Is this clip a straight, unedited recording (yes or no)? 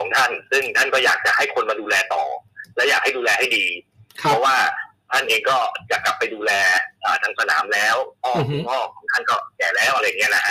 yes